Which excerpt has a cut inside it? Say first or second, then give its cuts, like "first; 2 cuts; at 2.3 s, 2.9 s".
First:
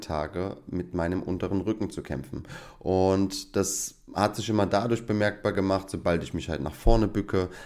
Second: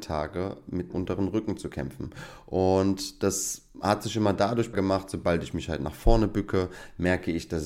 second; 2 cuts; at 0.9 s, 4.7 s